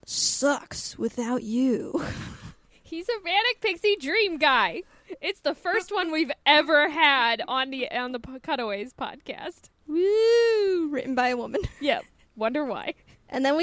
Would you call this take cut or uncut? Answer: uncut